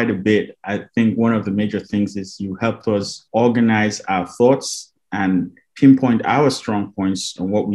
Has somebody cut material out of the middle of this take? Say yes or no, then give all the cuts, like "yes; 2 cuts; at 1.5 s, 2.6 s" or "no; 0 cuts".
yes; 2 cuts; at 3.3 s, 5.0 s